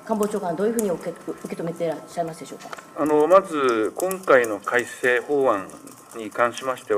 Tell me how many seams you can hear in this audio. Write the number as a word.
one